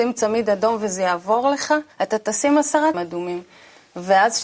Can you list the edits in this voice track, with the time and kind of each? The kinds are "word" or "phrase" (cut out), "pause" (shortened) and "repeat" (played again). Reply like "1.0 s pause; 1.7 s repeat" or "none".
1.9 s pause; 2.9 s word